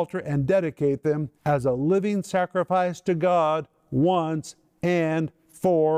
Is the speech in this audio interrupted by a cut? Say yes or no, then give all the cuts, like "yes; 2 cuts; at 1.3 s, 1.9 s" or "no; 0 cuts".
yes; 1 cut; at 1.4 s